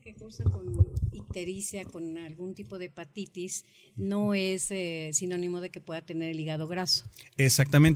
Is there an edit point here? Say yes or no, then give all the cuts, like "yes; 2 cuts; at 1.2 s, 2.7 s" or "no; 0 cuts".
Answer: no; 0 cuts